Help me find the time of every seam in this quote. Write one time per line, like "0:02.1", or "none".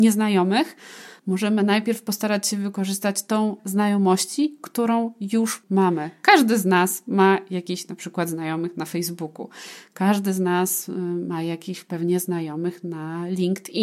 0:03.6